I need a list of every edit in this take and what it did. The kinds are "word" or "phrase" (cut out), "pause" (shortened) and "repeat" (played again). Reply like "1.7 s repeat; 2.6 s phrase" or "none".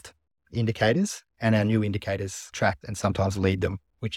2.8 s word